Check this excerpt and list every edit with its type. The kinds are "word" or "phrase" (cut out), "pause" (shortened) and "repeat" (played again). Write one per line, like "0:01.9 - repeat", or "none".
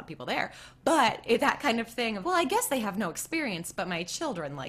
0:01.4 - word
0:02.2 - word